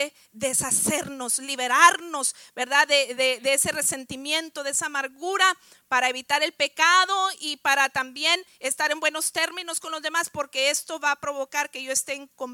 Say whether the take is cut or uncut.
uncut